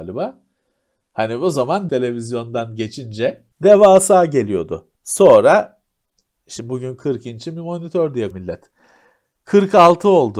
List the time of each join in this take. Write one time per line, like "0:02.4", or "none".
0:01.9
0:03.5
0:04.9
0:08.3